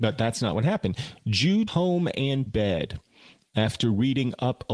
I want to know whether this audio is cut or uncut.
cut